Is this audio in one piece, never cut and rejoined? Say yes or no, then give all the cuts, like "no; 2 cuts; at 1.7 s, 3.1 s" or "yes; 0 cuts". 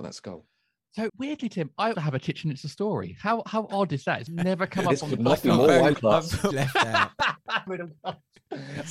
no; 6 cuts; at 1.1 s, 1.9 s, 4.3 s, 5.9 s, 6.5 s, 7.7 s